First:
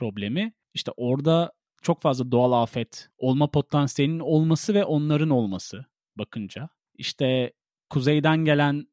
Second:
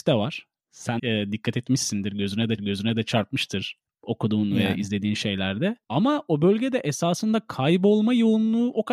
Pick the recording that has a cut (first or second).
second